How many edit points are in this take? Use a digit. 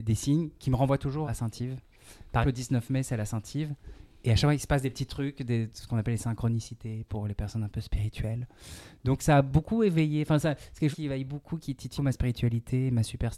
4